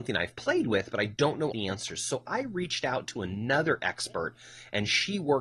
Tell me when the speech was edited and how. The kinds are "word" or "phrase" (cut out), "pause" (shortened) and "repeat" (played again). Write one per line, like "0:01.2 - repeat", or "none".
0:01.5 - word